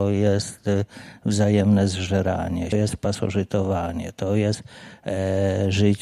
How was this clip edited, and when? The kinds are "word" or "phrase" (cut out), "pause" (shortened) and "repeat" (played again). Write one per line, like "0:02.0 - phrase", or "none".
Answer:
0:02.7 - phrase